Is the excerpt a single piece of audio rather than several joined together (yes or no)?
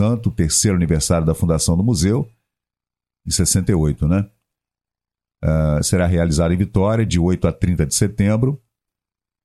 yes